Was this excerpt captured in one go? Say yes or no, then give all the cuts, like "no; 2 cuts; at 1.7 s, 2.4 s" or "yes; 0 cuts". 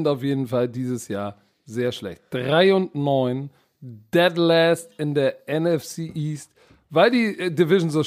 yes; 0 cuts